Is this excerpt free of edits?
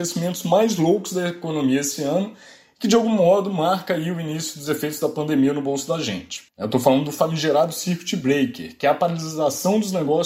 no; 1 cut; at 6.5 s

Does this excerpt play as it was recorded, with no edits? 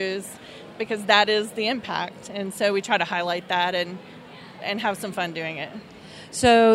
yes; 0 cuts

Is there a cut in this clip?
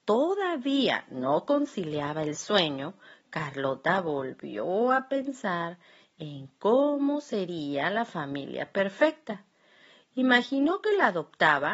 no; 0 cuts

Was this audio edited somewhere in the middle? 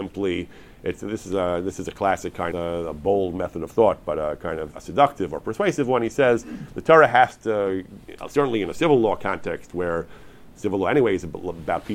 yes; 2 cuts; at 2.5 s, 4.7 s

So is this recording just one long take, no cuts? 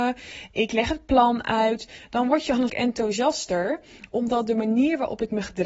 no; 1 cut; at 2.7 s

